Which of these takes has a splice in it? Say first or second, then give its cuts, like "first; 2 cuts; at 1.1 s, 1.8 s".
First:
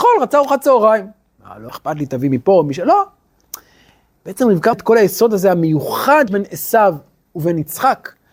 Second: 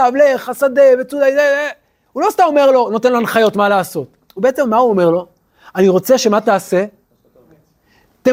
first; 3 cuts; at 1.7 s, 4.7 s, 6.3 s